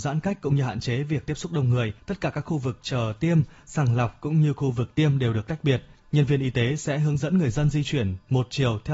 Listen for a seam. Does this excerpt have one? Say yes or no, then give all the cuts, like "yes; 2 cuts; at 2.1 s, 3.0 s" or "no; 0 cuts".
yes; 2 cuts; at 2.0 s, 5.9 s